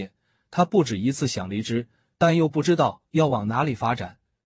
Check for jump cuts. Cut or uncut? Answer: uncut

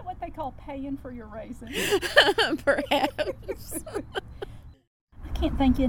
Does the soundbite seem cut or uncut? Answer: uncut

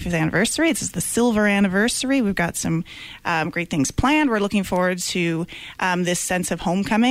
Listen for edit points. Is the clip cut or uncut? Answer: uncut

